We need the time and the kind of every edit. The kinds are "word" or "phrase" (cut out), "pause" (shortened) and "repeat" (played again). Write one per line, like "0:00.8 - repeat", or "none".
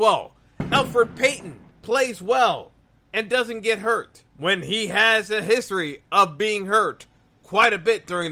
0:01.7 - pause
0:04.3 - pause